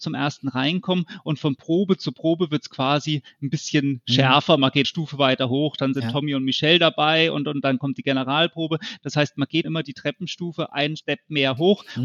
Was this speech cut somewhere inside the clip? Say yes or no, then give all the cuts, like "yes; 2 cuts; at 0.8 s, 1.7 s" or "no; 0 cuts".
yes; 2 cuts; at 4.8 s, 9.6 s